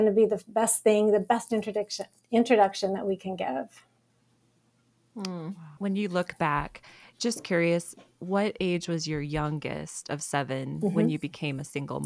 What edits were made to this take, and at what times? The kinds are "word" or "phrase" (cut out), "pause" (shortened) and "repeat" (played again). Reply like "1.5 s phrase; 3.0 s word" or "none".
none